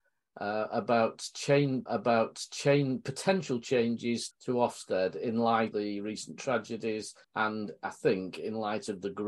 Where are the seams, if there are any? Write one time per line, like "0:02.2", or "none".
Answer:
0:01.9
0:04.3
0:05.7
0:07.2